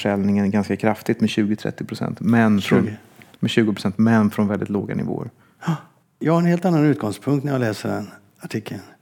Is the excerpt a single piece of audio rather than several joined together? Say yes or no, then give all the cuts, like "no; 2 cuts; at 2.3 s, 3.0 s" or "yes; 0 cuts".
yes; 0 cuts